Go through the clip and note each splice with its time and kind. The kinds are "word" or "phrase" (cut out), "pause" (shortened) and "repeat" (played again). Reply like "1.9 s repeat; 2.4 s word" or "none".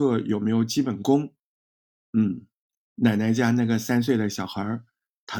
none